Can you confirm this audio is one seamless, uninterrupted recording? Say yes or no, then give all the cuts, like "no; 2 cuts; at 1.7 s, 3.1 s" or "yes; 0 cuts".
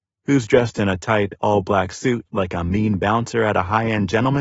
yes; 0 cuts